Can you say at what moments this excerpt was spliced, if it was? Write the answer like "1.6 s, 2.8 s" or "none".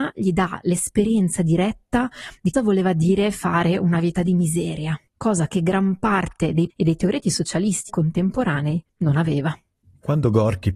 2.5 s, 5.1 s, 6.7 s, 7.9 s, 8.9 s